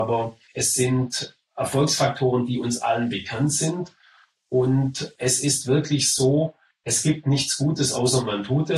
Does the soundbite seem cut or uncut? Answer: uncut